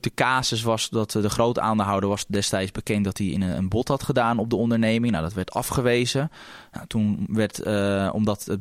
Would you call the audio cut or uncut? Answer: uncut